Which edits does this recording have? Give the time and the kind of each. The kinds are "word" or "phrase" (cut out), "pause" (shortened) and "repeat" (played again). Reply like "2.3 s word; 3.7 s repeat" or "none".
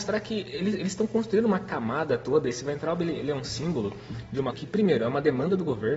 4.5 s word